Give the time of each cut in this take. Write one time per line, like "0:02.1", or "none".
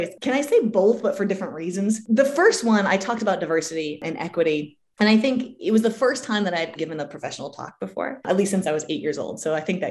0:06.8